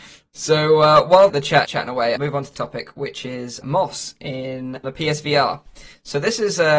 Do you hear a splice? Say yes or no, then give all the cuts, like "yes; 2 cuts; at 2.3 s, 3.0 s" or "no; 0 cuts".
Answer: yes; 6 cuts; at 1.3 s, 1.6 s, 2.2 s, 2.5 s, 3.6 s, 4.8 s